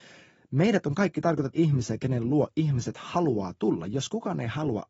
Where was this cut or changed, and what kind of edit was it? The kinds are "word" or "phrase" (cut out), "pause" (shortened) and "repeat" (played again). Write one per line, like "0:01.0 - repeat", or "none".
0:01.6 - word
0:02.0 - word